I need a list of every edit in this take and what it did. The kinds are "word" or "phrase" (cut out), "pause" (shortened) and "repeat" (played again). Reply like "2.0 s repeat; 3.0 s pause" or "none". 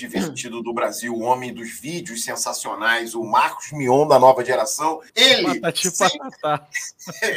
5.1 s pause